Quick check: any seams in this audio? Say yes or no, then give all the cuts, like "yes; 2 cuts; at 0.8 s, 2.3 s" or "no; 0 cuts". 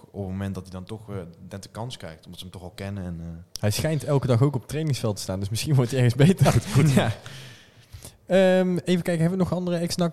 no; 0 cuts